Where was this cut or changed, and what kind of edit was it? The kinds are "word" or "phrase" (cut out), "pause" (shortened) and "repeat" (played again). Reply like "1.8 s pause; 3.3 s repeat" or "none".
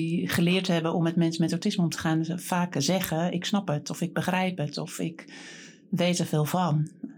none